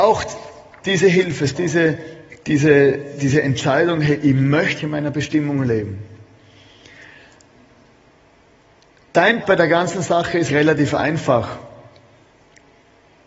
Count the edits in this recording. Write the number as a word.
four